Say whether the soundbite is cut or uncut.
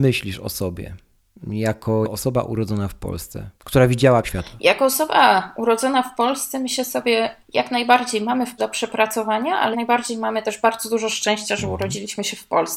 cut